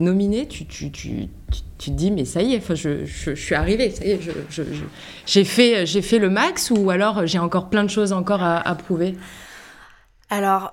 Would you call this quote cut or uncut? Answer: uncut